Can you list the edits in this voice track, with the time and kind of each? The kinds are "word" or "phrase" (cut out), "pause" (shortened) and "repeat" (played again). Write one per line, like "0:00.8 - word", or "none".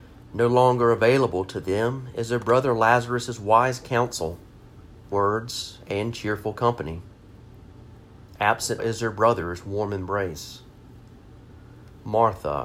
0:05.1 - word
0:08.8 - word